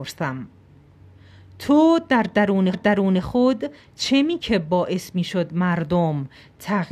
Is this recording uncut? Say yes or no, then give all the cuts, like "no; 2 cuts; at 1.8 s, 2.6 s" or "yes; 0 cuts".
no; 2 cuts; at 2.7 s, 4.4 s